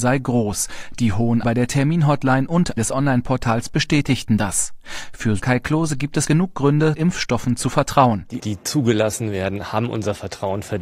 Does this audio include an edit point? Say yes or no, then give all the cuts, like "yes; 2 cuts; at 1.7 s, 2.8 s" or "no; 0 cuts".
yes; 6 cuts; at 1.4 s, 2.8 s, 5.4 s, 6.2 s, 7.0 s, 8.4 s